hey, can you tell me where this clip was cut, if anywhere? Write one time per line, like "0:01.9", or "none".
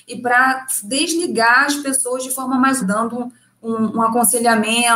0:02.8